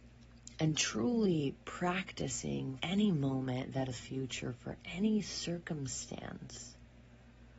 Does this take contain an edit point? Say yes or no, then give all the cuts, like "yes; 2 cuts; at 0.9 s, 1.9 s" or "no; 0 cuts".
yes; 2 cuts; at 2.8 s, 3.9 s